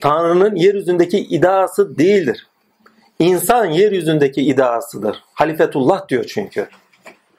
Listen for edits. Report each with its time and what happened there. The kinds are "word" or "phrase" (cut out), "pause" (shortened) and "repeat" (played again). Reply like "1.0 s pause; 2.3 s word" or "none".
none